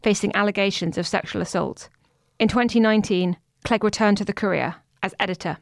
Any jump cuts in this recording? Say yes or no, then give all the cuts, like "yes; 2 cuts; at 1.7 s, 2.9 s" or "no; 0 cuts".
no; 0 cuts